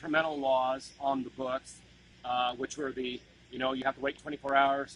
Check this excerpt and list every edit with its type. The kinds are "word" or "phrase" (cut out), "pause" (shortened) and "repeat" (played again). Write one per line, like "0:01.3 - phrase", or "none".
none